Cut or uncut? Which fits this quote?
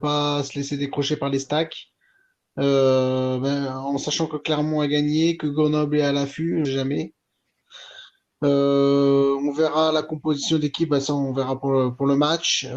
cut